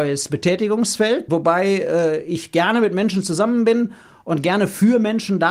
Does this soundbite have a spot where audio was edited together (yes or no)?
yes